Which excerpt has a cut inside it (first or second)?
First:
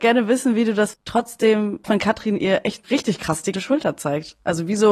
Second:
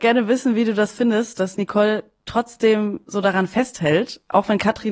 first